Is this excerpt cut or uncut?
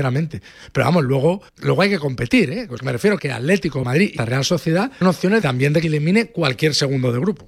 cut